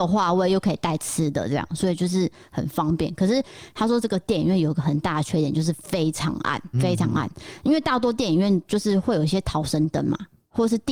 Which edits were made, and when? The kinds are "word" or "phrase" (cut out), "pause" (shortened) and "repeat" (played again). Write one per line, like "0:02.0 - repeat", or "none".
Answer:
0:06.7 - word